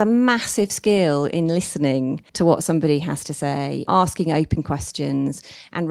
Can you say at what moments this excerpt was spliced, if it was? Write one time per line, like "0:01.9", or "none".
0:02.3
0:03.8